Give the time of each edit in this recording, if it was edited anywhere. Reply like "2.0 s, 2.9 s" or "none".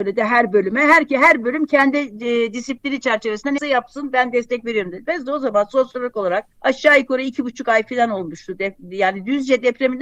3.6 s, 6.5 s